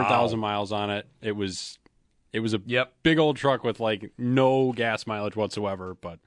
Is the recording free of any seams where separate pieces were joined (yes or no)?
yes